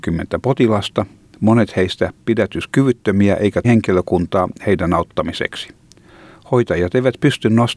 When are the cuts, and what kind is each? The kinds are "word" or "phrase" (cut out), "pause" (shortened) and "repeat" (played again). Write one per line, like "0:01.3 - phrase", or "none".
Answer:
0:03.6 - word